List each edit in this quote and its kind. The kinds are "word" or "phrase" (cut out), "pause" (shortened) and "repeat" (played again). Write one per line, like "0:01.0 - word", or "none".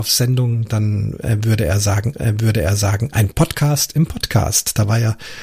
0:02.1 - repeat